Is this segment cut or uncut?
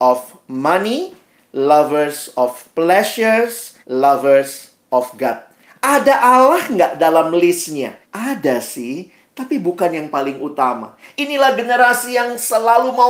cut